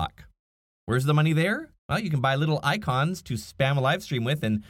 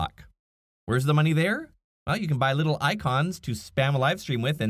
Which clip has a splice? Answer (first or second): first